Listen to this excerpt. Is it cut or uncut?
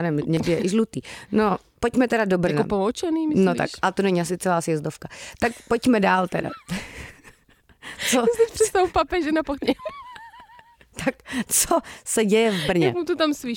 uncut